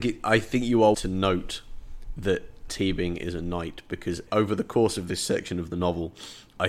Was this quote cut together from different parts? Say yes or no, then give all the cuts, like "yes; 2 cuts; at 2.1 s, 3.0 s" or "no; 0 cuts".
yes; 3 cuts; at 0.9 s, 2.7 s, 4.3 s